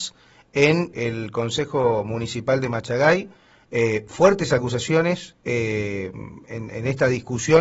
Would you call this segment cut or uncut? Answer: cut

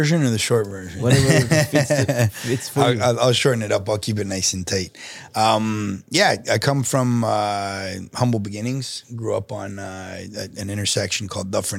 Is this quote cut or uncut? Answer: uncut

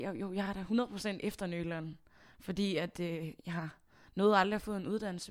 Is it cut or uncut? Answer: uncut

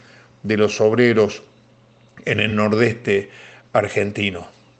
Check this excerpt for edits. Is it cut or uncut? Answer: uncut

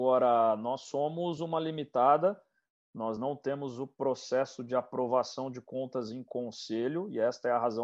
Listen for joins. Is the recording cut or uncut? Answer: uncut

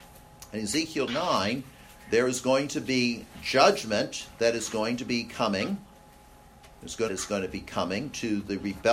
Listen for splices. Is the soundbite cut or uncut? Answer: cut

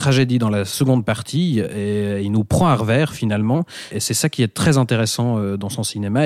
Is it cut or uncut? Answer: cut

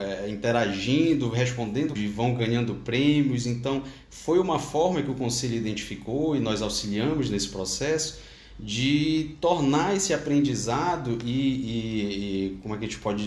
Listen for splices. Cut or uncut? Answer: cut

